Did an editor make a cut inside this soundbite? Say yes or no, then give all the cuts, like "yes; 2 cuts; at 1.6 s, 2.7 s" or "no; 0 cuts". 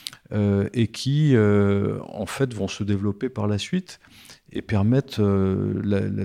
no; 0 cuts